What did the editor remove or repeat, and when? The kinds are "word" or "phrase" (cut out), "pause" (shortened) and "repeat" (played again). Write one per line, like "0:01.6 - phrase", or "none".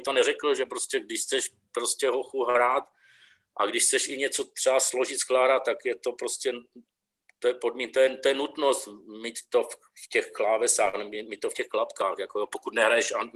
none